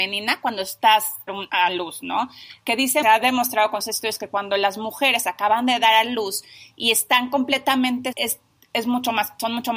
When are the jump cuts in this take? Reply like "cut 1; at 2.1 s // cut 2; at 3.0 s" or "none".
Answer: cut 1; at 1.3 s // cut 2; at 3.0 s // cut 3; at 3.8 s // cut 4; at 8.1 s